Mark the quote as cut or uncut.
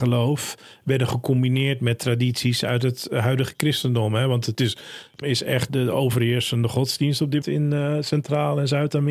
cut